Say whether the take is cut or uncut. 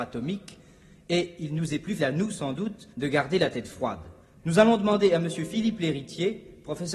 cut